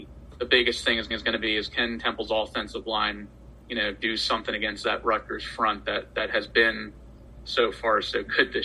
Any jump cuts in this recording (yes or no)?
yes